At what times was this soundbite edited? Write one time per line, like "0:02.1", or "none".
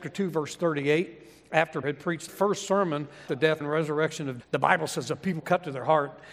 0:01.8
0:02.3
0:03.3
0:03.6
0:04.4
0:05.4